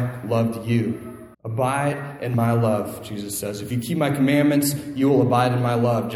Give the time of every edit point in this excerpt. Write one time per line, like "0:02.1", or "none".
0:01.3